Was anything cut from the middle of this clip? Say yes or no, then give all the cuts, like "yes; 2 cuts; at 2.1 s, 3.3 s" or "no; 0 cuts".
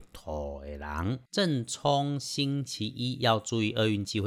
yes; 1 cut; at 1.3 s